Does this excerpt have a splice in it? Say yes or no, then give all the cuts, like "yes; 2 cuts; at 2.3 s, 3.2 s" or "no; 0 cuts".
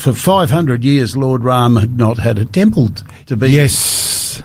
no; 0 cuts